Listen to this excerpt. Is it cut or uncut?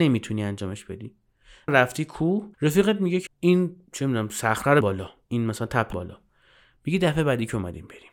cut